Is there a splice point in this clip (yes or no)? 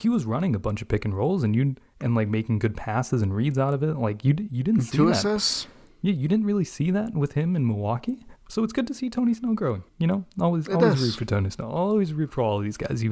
yes